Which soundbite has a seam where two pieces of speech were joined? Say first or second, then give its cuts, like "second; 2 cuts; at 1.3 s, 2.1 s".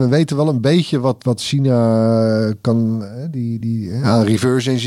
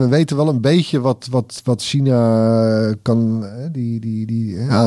first; 2 cuts; at 1.2 s, 3.6 s